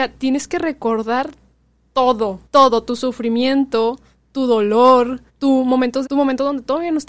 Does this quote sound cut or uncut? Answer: cut